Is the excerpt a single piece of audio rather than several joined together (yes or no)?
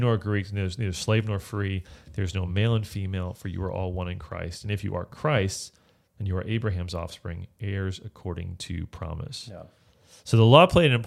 yes